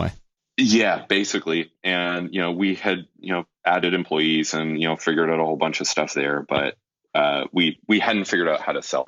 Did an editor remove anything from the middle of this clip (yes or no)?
no